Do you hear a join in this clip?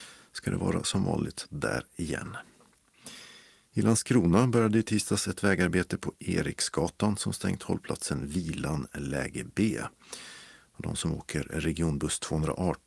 no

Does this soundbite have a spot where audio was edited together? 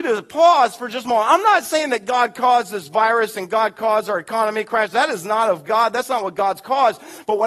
no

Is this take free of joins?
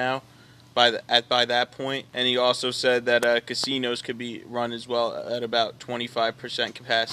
no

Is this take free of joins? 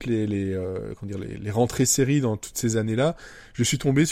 yes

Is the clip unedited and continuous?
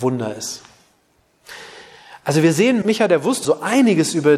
no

